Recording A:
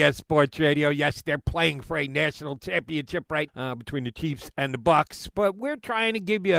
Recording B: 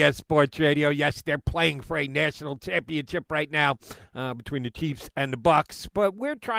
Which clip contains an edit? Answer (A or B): A